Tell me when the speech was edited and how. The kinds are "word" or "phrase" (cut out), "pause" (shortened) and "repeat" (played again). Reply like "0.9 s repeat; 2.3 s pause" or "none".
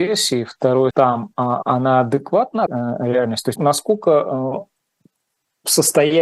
0.9 s word; 2.7 s word; 3.6 s word